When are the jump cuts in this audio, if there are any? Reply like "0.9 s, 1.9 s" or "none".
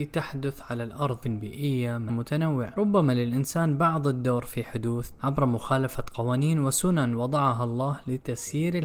1.2 s, 2.1 s, 5.2 s